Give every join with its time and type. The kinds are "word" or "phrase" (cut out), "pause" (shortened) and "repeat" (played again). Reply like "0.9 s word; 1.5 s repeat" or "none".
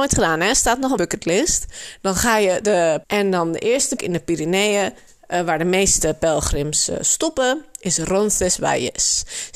1.0 s word; 2.6 s word; 3.0 s word; 4.0 s word